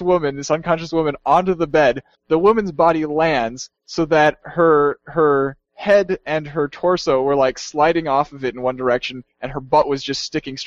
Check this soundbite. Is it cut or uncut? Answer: uncut